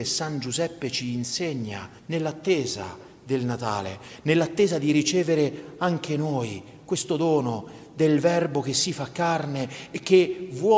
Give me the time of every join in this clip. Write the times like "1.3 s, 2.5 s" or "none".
2.0 s